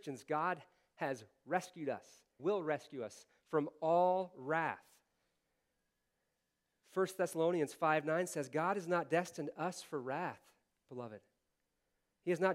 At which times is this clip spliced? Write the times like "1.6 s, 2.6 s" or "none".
2.4 s